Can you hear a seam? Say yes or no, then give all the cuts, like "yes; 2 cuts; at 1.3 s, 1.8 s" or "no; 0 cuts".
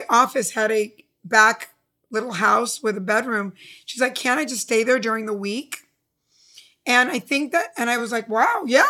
no; 0 cuts